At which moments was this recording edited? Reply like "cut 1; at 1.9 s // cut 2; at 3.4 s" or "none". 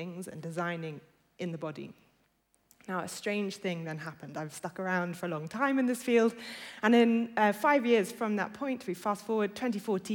none

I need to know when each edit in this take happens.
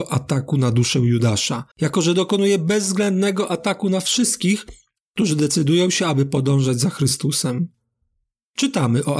cut 1; at 1.7 s

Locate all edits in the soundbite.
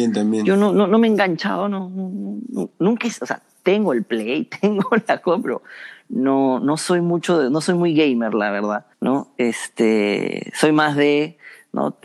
cut 1; at 8.9 s

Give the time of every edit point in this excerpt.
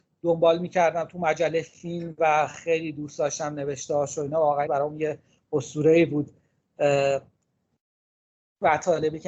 cut 1; at 4.7 s

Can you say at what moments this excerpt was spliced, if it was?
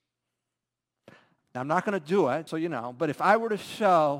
cut 1; at 2.5 s

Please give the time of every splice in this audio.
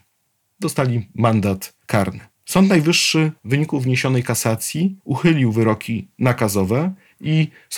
cut 1; at 1.8 s // cut 2; at 3.4 s // cut 3; at 5.0 s

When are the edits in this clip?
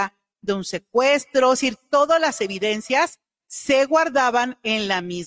none

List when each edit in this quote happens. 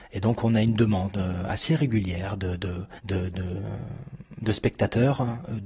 cut 1; at 3.0 s

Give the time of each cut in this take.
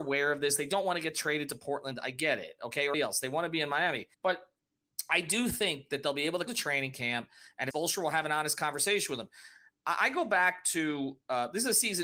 cut 1; at 2.9 s // cut 2; at 4.1 s // cut 3; at 6.5 s // cut 4; at 7.7 s

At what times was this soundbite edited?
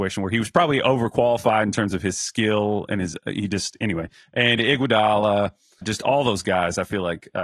cut 1; at 5.8 s

